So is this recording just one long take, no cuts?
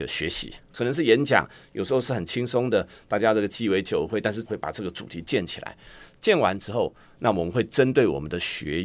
yes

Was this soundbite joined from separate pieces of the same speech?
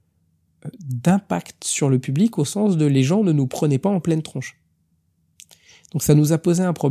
no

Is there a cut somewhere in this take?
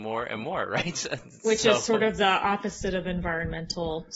no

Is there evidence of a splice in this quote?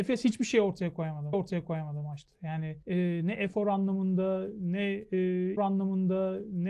yes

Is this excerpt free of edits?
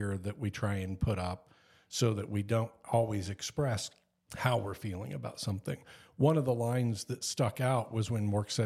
yes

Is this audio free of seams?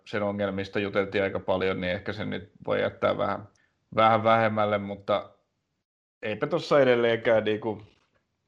no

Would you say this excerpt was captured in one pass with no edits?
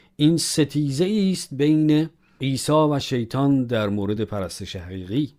yes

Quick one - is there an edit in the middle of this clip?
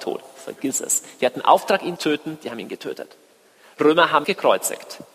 yes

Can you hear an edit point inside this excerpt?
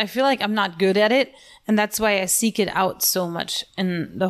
no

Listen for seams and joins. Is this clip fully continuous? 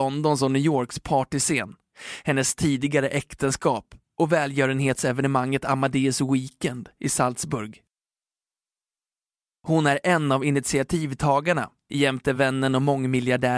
yes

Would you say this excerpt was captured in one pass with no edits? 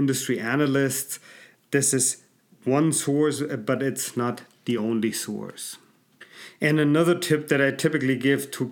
yes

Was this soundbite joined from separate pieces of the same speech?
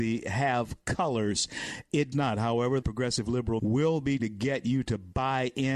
yes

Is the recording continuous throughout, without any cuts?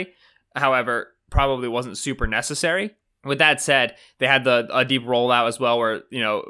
yes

